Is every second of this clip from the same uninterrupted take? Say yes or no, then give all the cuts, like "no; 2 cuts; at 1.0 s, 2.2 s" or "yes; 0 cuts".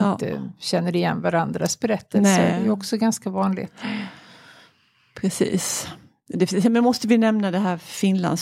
yes; 0 cuts